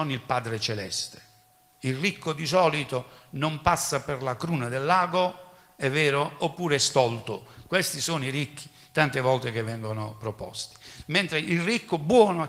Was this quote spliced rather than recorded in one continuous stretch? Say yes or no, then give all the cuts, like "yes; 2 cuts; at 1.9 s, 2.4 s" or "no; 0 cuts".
no; 0 cuts